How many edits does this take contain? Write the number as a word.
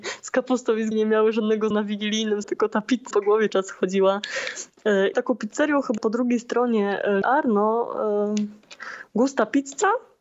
eight